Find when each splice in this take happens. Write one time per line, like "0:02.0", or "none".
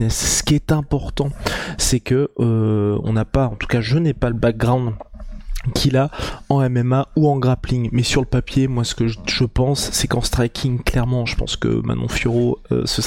none